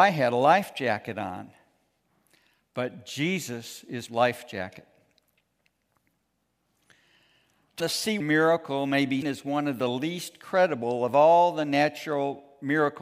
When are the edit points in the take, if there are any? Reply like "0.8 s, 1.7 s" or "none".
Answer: 4.1 s, 7.8 s, 8.2 s, 9.2 s